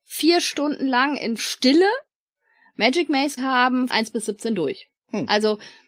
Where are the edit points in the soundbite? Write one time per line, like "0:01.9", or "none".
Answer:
0:01.4
0:03.4
0:03.9
0:05.0